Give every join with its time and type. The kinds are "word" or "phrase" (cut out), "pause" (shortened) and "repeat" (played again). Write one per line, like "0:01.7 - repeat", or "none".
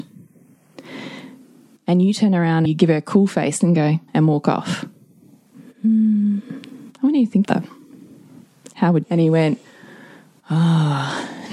0:02.6 - word
0:04.1 - word
0:07.4 - word
0:09.0 - phrase